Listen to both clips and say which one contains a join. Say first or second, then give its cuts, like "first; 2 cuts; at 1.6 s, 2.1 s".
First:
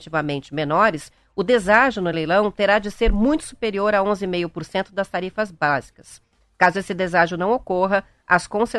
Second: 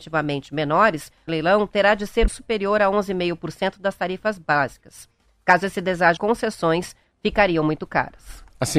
second; 3 cuts; at 1.3 s, 2.3 s, 6.2 s